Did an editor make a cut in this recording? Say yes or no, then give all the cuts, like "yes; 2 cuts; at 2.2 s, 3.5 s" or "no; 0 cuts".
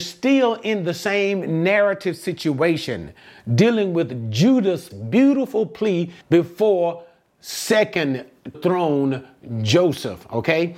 yes; 3 cuts; at 4.9 s, 6.2 s, 8.5 s